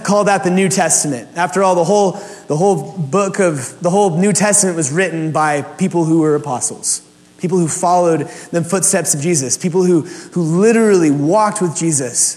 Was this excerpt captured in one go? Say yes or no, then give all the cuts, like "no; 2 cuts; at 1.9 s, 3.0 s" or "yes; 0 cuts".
yes; 0 cuts